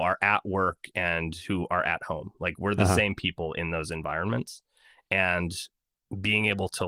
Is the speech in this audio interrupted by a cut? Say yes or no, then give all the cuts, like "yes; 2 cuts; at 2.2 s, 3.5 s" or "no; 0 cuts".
no; 0 cuts